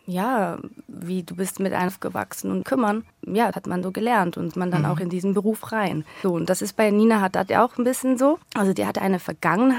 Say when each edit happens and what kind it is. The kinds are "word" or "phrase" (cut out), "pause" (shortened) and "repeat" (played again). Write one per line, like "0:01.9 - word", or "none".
0:01.9 - word
0:02.6 - phrase
0:03.5 - word
0:03.8 - word
0:04.5 - phrase
0:08.4 - pause